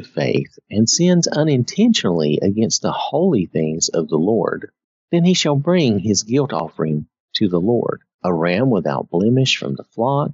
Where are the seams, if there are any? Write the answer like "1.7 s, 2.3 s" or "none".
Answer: 4.8 s, 8.1 s